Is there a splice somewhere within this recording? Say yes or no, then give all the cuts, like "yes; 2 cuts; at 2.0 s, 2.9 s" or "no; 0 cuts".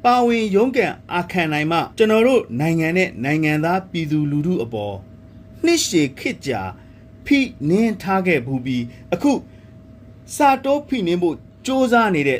yes; 1 cut; at 1.9 s